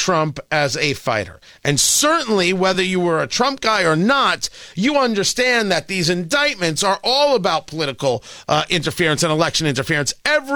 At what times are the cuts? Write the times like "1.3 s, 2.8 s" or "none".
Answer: none

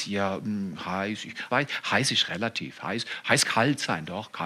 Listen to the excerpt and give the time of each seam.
1.5 s, 3.4 s

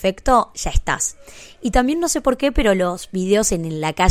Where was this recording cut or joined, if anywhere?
none

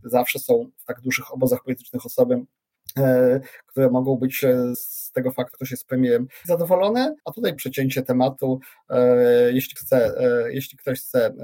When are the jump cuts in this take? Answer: 4.7 s, 5.5 s, 6.4 s, 7.2 s, 7.6 s, 9.8 s

